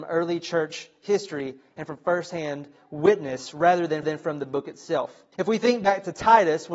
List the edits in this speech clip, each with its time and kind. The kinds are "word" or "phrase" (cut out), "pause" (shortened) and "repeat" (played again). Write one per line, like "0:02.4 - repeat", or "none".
0:04.0 - repeat
0:05.3 - pause